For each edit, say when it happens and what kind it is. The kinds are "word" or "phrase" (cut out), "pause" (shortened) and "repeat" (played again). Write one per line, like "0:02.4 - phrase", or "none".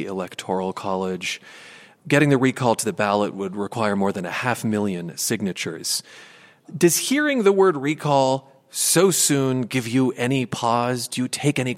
none